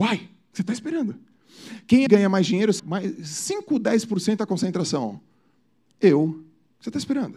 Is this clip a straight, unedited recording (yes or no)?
no